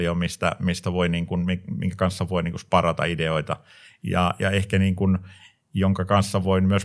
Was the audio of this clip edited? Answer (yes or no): no